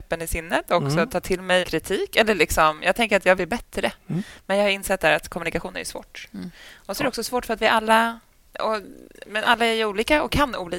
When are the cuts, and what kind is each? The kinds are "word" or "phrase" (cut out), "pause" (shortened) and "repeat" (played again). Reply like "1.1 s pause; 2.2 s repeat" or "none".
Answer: 1.6 s word; 3.4 s word